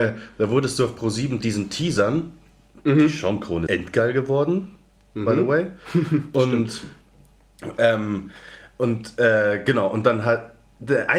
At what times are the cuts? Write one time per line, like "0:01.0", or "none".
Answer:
0:01.4
0:03.7